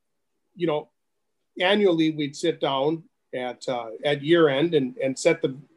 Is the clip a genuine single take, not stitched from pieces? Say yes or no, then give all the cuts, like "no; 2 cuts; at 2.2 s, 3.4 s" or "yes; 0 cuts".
yes; 0 cuts